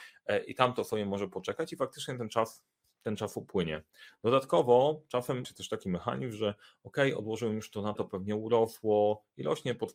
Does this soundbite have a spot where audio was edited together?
yes; 2 cuts; at 5.4 s, 8.0 s

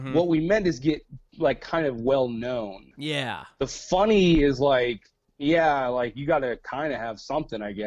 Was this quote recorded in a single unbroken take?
yes; 0 cuts

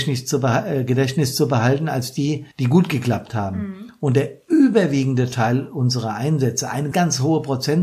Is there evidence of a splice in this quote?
yes; 2 cuts; at 2.5 s, 6.9 s

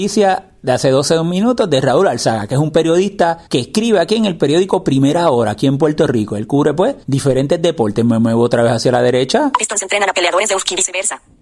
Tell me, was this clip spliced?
yes; 2 cuts; at 3.5 s, 7.0 s

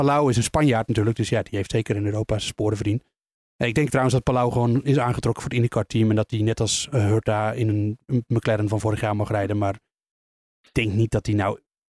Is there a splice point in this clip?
no; 0 cuts

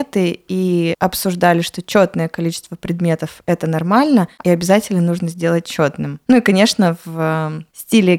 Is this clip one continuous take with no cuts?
no; 1 cut; at 4.4 s

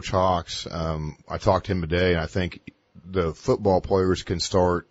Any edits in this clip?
no; 0 cuts

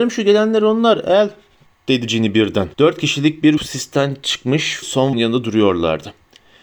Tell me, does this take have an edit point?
yes; 4 cuts; at 2.7 s, 3.6 s, 4.8 s, 5.1 s

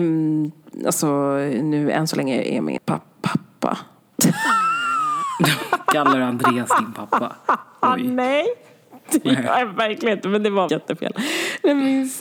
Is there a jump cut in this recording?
yes; 2 cuts; at 2.8 s, 10.7 s

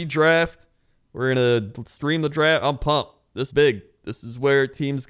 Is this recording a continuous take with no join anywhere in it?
no; 1 cut; at 3.5 s

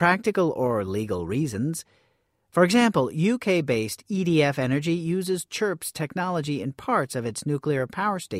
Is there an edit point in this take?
no; 0 cuts

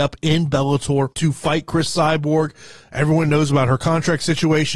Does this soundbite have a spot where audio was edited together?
yes; 1 cut; at 1.1 s

